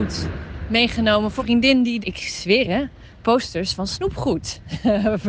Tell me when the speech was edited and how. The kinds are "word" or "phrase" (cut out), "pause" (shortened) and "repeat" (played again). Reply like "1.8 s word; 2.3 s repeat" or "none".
1.4 s word; 2.0 s word; 2.6 s word